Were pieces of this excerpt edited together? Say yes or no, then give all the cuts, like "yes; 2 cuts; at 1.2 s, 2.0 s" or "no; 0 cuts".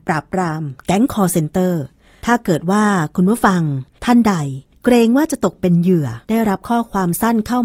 yes; 1 cut; at 6.2 s